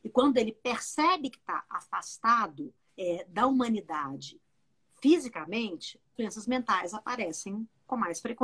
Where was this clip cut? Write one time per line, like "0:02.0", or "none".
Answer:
0:02.9
0:06.2